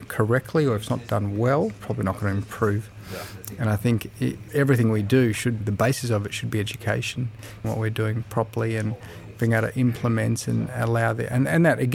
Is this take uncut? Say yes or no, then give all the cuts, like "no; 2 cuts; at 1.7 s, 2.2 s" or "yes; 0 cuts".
no; 4 cuts; at 1.8 s, 4.5 s, 5.6 s, 7.6 s